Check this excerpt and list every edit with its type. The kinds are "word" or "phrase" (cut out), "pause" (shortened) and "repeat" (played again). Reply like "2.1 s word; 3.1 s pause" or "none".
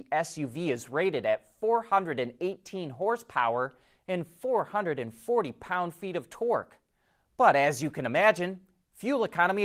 none